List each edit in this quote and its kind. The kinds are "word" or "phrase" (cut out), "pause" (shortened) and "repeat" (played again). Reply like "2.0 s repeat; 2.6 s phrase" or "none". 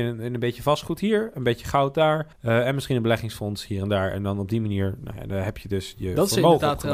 2.3 s pause